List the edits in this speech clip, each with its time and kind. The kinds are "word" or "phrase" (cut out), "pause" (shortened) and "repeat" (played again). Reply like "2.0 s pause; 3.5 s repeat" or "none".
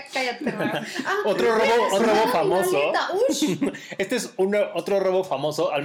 2.0 s word